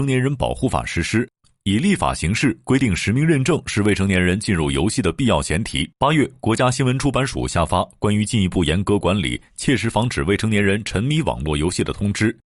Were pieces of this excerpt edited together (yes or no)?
yes